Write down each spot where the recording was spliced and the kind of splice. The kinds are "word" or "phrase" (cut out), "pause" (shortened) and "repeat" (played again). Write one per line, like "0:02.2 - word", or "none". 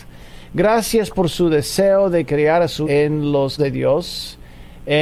0:02.8 - word
0:03.6 - word